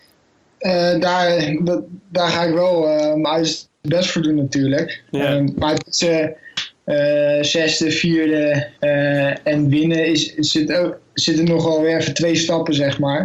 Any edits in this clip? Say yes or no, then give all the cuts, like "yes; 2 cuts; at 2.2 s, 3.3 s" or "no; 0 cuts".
yes; 1 cut; at 8.7 s